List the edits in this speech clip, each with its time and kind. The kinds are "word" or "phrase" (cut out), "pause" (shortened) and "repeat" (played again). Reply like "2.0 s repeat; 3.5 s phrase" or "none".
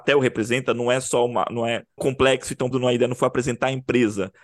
2.0 s word; 2.7 s word